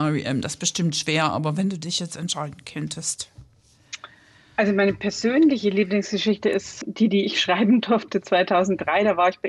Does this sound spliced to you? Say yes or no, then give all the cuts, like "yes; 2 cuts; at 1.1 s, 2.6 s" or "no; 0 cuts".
no; 0 cuts